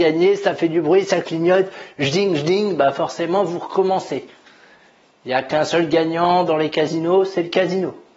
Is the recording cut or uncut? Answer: uncut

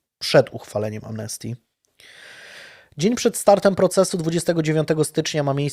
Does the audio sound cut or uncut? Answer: uncut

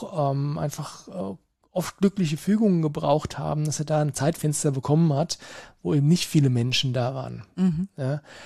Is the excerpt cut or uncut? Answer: uncut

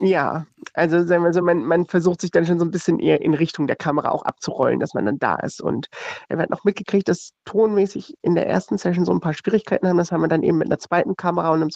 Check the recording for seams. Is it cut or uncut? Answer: uncut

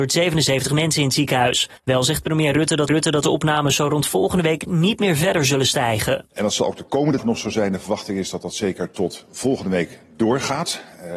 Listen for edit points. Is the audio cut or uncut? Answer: cut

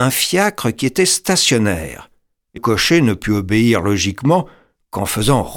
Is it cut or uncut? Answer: cut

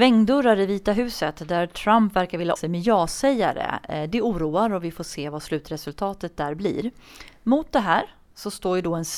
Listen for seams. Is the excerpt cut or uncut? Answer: cut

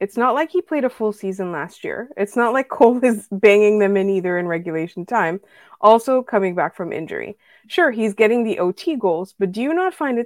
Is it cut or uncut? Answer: uncut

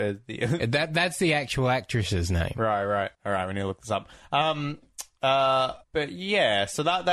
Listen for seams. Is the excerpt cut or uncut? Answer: cut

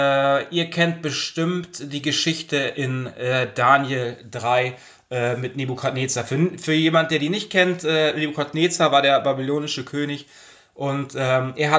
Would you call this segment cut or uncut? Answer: uncut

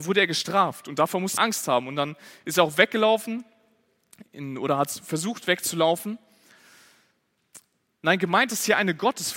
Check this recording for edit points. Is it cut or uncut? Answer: cut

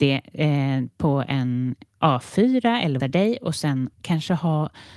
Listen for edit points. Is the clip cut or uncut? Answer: cut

